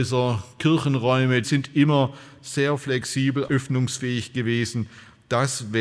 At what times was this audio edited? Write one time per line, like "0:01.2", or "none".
0:01.4
0:03.5